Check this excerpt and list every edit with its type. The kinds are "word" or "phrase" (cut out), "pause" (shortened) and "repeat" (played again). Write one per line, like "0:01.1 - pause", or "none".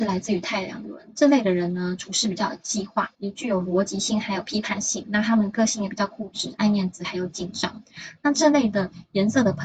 0:03.1 - pause